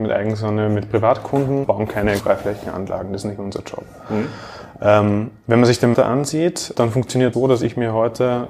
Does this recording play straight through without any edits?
no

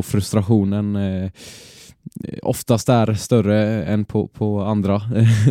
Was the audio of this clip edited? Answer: no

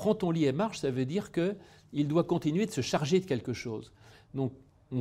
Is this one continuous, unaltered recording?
yes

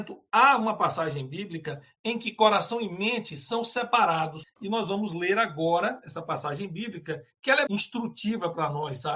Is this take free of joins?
no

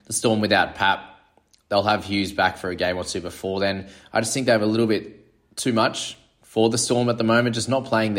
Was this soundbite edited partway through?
no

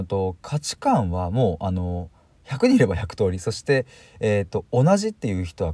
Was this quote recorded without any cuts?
yes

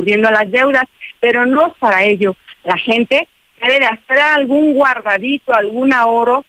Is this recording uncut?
no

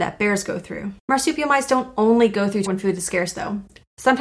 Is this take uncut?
no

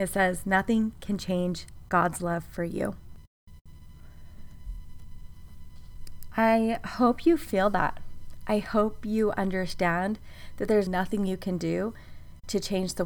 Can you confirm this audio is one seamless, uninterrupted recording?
no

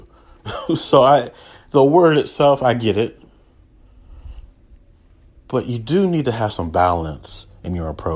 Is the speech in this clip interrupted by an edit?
no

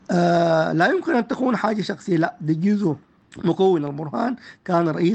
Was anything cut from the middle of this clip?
no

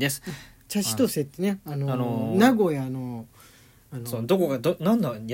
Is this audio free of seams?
yes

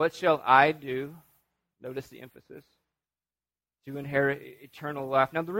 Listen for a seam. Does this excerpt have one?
no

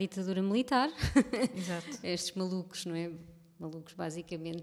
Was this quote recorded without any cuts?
yes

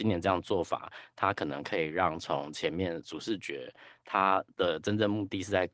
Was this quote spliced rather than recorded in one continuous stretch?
yes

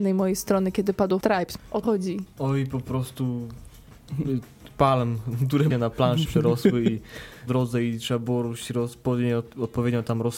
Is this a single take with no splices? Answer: no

